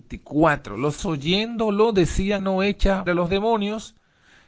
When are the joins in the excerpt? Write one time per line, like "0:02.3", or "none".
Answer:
0:01.0
0:02.4
0:03.1